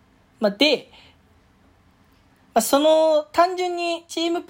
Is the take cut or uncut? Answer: uncut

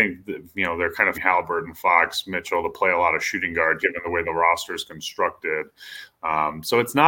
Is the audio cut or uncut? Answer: cut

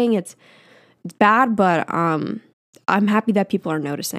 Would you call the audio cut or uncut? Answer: cut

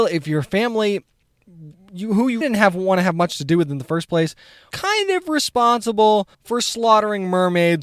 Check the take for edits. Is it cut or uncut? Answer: cut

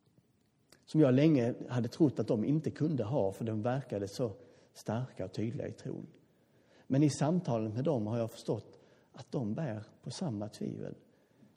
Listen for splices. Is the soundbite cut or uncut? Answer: uncut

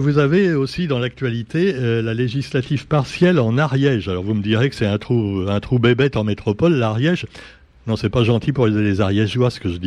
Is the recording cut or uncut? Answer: uncut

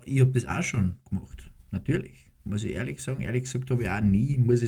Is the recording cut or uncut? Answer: cut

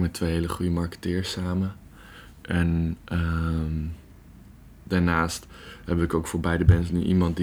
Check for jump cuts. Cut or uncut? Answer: uncut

